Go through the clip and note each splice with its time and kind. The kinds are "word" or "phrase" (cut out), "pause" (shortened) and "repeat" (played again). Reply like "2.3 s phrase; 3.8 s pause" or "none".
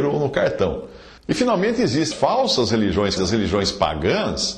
1.2 s pause; 2.1 s word; 3.2 s word

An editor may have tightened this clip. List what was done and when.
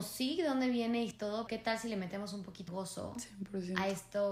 1.1 s word; 1.5 s word; 2.7 s word

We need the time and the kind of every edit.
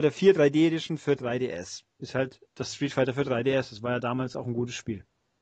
2.5 s pause

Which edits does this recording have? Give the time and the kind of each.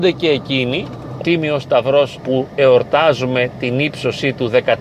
1.2 s phrase; 2.2 s word

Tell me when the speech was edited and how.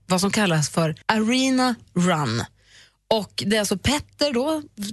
1.0 s pause

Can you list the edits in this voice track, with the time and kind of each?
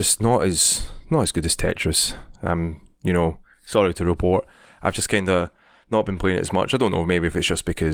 none

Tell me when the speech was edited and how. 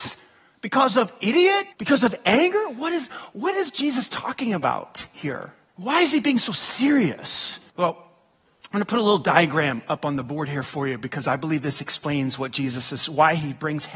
1.7 s pause; 5.7 s pause; 7.7 s pause

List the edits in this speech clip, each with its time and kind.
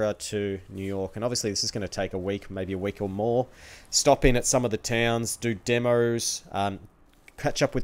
none

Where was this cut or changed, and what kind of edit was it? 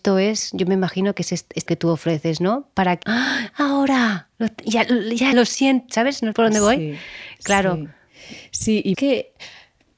1.7 s phrase; 3.0 s phrase; 4.3 s pause; 5.3 s word; 6.3 s word; 8.9 s word

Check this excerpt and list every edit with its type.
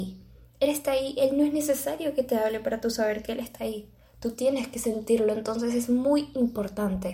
none

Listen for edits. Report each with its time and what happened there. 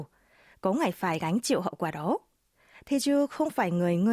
none

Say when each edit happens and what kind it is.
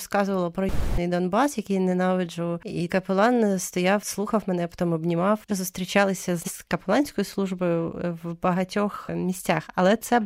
2.9 s word; 5.5 s phrase; 6.4 s word

